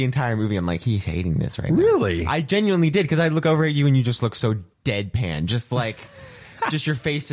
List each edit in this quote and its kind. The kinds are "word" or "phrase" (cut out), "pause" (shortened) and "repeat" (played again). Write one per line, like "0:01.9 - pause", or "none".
0:04.7 - pause